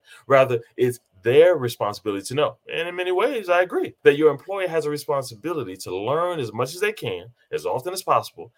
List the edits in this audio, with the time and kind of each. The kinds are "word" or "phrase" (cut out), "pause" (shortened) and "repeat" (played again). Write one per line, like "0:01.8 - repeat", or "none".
0:02.6 - pause
0:04.0 - pause